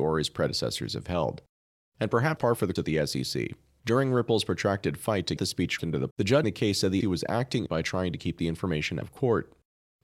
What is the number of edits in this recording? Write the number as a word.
nine